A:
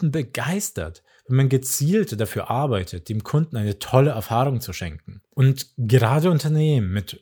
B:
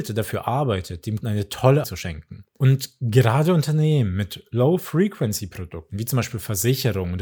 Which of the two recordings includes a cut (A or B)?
B